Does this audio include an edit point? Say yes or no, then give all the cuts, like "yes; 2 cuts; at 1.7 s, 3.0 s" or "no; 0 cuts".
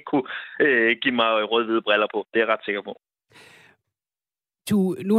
no; 0 cuts